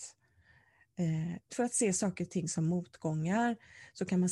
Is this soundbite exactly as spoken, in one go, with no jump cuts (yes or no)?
no